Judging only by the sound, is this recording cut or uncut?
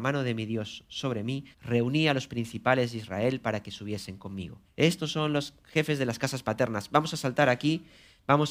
cut